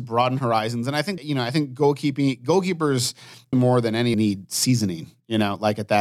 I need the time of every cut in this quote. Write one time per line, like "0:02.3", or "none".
0:01.2
0:03.5
0:04.1